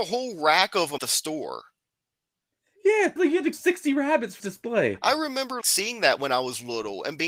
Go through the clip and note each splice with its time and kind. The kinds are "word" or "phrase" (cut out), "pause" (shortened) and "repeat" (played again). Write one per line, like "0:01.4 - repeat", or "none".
0:01.0 - word
0:03.2 - word
0:03.5 - word
0:04.4 - word
0:05.6 - word